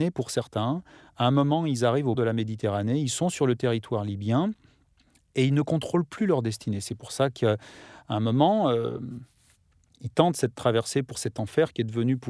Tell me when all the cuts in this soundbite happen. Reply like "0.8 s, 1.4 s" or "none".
2.1 s, 11.1 s